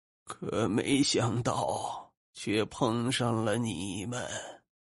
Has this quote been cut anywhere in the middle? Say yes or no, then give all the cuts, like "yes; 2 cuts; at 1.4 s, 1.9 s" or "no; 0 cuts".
yes; 1 cut; at 2.2 s